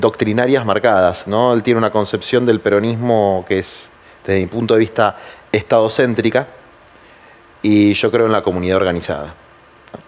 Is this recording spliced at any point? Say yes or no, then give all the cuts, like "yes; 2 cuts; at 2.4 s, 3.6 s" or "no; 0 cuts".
no; 0 cuts